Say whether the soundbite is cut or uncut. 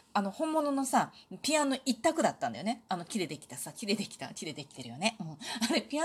uncut